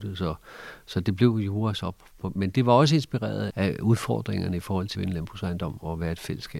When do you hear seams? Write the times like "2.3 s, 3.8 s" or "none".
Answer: 2.5 s, 3.5 s, 4.9 s